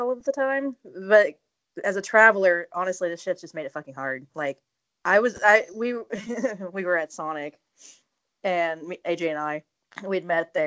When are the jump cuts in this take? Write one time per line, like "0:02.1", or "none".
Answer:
none